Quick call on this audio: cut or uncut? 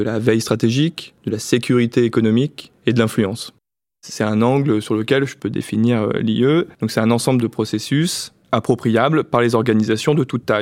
cut